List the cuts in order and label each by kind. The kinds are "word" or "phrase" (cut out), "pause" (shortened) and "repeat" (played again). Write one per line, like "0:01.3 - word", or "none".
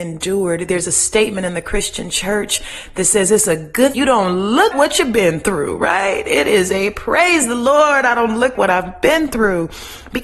0:03.9 - word
0:04.7 - word
0:08.5 - word